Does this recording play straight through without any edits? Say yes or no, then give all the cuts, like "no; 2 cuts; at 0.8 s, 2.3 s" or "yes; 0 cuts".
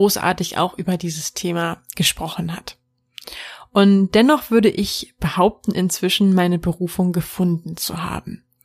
yes; 0 cuts